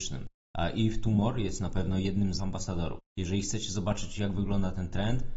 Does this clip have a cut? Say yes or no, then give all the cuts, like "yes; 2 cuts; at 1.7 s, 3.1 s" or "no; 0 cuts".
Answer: yes; 1 cut; at 2.4 s